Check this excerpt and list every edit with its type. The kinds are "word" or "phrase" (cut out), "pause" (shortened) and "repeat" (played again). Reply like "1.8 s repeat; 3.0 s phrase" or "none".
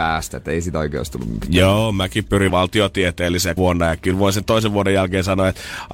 2.5 s phrase; 3.6 s word